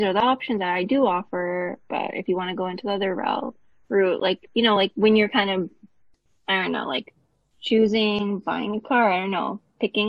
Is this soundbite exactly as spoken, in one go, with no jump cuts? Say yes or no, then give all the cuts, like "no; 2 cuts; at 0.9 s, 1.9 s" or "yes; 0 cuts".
yes; 0 cuts